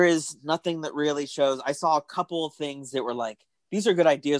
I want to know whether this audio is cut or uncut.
uncut